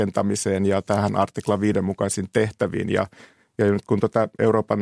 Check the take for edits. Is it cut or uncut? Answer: uncut